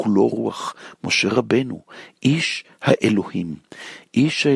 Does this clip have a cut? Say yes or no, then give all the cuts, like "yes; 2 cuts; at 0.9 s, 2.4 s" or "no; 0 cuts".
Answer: no; 0 cuts